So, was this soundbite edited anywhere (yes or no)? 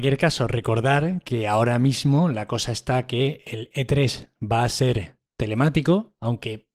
yes